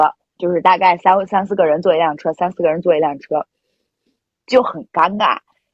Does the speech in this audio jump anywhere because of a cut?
no; 0 cuts

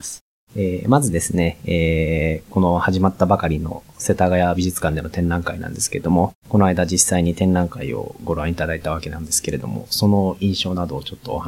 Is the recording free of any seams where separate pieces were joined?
no; 1 cut; at 6.4 s

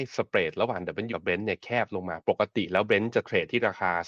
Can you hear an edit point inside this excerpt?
yes; 1 cut; at 1.1 s

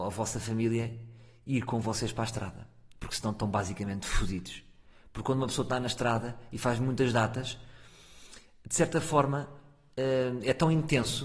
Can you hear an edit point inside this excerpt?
no; 0 cuts

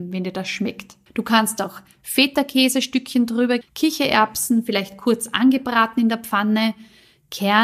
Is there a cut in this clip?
yes; 2 cuts; at 1.1 s, 3.6 s

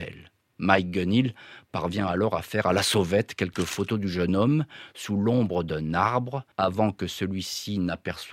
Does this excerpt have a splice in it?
yes; 1 cut; at 6.5 s

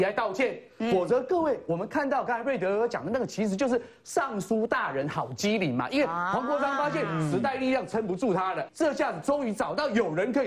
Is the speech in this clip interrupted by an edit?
yes; 1 cut; at 8.7 s

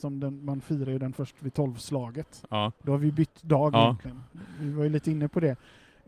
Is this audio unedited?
yes; 0 cuts

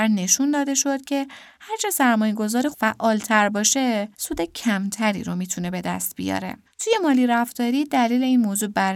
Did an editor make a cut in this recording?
yes; 3 cuts; at 2.7 s, 4.1 s, 6.6 s

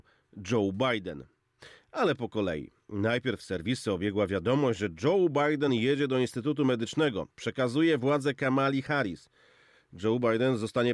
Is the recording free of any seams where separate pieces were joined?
yes; 0 cuts

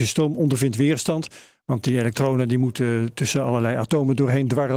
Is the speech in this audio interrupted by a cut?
no; 0 cuts

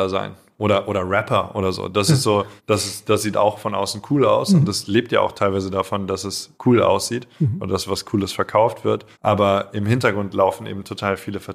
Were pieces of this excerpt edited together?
yes; 3 cuts; at 2.6 s, 6.5 s, 9.1 s

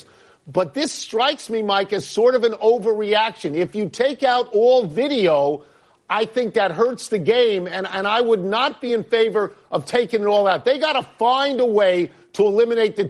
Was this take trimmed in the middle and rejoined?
no; 0 cuts

